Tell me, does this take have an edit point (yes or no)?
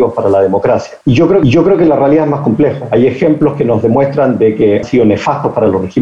yes